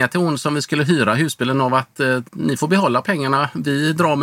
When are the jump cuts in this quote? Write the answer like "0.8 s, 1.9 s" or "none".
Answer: 2.3 s